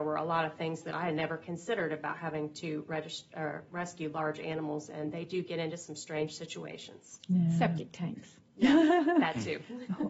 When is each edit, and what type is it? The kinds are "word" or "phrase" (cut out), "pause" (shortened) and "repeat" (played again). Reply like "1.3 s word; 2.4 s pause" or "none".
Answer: none

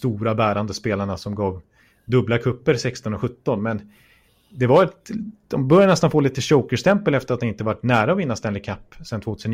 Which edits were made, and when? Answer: none

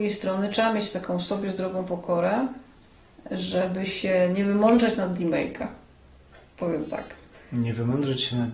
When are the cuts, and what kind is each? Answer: none

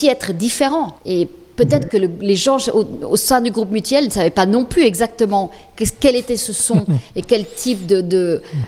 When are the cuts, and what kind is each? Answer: 1.0 s pause

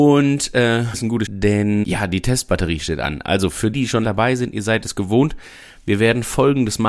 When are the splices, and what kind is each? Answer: 0.9 s word; 1.3 s word; 1.8 s word; 3.7 s word; 4.0 s word

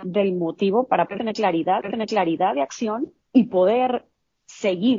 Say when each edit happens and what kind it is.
1.8 s repeat; 3.2 s pause

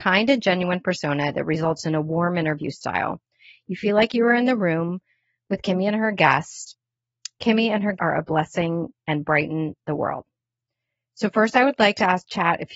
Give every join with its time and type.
8.0 s word

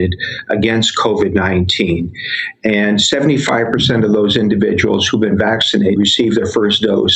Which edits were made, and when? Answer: 6.0 s word

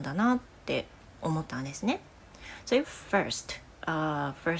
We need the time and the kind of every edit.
2.8 s word

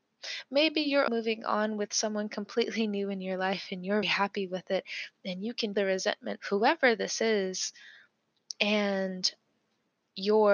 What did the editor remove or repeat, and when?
1.1 s word; 4.0 s word; 5.7 s word; 6.4 s word

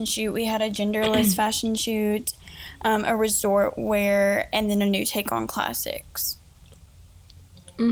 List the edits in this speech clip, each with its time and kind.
none

